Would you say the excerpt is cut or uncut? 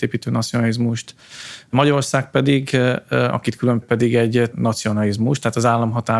cut